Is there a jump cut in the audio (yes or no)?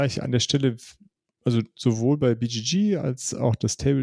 no